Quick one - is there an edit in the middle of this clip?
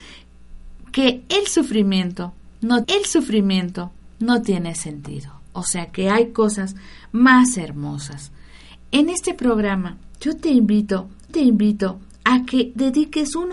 yes; 2 cuts; at 2.8 s, 11.3 s

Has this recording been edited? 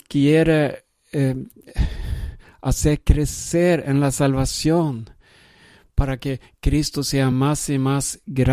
no; 0 cuts

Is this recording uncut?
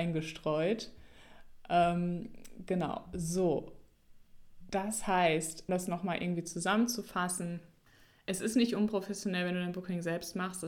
no; 2 cuts; at 5.7 s, 7.9 s

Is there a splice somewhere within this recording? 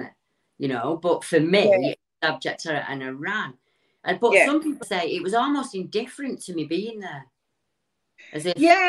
yes; 1 cut; at 4.8 s

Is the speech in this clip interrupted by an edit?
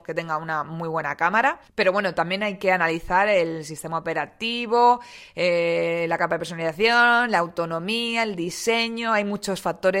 yes; 1 cut; at 1.7 s

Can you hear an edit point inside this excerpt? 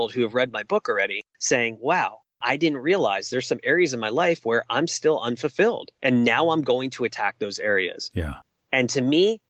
no; 0 cuts

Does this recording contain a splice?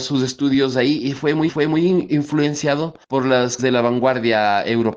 yes; 3 cuts; at 1.5 s, 3.0 s, 3.6 s

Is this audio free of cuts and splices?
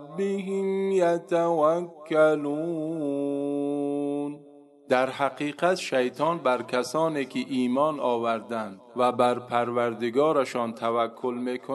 yes; 0 cuts

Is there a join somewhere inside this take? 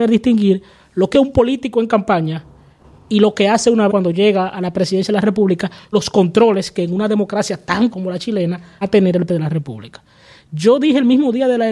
yes; 6 cuts; at 1.1 s, 3.9 s, 5.9 s, 7.9 s, 8.8 s, 9.3 s

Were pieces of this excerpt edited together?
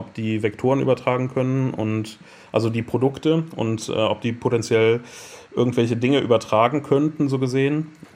no; 0 cuts

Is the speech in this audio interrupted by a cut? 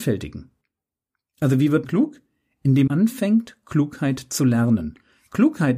yes; 2 cuts; at 1.8 s, 2.9 s

